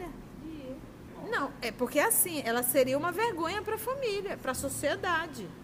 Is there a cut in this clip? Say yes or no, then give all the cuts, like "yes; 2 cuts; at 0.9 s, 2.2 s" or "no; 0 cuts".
no; 0 cuts